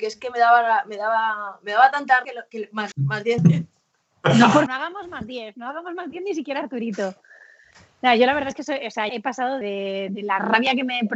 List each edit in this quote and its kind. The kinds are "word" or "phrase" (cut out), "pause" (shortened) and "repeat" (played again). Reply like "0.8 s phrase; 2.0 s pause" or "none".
2.2 s word; 2.9 s word; 3.4 s word; 4.7 s word; 9.1 s word; 9.6 s word